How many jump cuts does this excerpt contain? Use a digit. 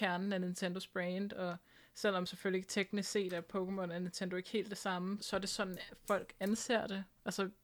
1